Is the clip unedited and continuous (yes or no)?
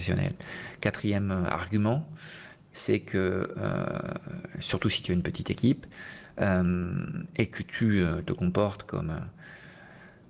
yes